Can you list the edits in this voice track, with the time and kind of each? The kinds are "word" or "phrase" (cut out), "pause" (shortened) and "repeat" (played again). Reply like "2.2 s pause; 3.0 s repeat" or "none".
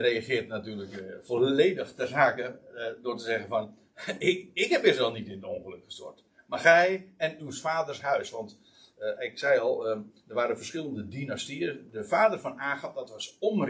none